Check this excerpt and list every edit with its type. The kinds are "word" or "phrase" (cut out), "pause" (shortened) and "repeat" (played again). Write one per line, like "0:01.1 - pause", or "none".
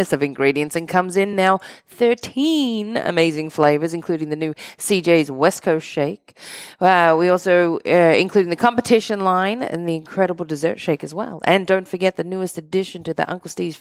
none